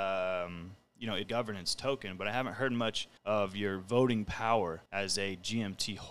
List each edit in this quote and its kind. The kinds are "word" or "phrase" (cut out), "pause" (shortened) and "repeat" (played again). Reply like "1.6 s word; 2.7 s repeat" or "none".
1.2 s phrase; 3.2 s pause; 4.9 s pause

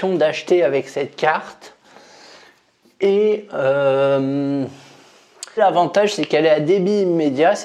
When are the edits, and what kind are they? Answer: 5.6 s word

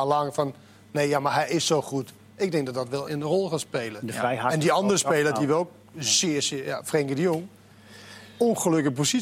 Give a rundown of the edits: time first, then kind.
3.1 s word

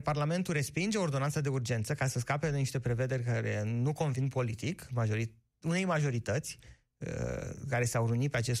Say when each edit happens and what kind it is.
none

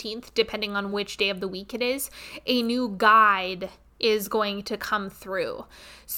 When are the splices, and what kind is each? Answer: none

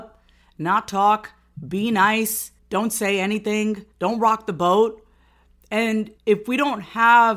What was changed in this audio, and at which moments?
2.6 s pause; 3.9 s pause; 6.2 s pause

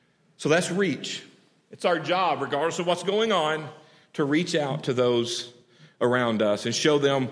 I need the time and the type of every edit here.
none

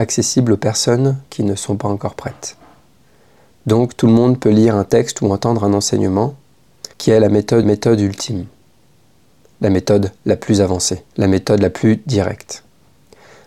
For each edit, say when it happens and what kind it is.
6.9 s pause; 7.6 s repeat; 10.2 s pause; 11.1 s pause

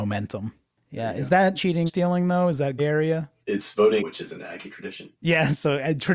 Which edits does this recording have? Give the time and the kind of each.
1.5 s word; 1.9 s word; 2.8 s word; 3.4 s pause; 4.0 s phrase; 5.2 s pause

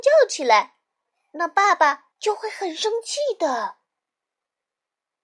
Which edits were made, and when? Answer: 2.1 s pause

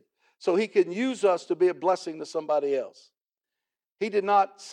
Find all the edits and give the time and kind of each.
none

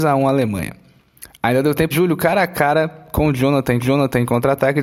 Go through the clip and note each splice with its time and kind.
1.9 s word; 3.8 s repeat

